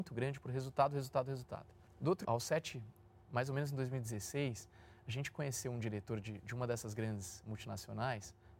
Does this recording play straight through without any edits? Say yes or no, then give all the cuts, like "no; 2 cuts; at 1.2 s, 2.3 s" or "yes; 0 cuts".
no; 1 cut; at 2.2 s